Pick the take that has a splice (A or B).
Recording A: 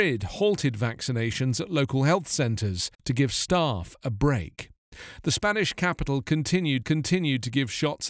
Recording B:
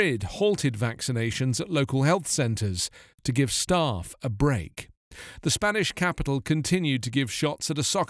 A